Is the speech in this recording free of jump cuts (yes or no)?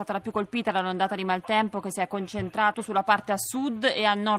no